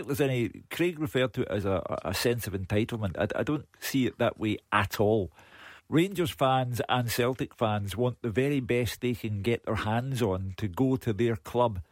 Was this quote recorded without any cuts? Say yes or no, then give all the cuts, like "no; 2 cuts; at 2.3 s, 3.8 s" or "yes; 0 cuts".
no; 1 cut; at 5.8 s